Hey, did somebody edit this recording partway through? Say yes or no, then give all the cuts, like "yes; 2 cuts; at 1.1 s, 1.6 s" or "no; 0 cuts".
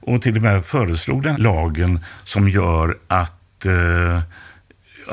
yes; 1 cut; at 1.3 s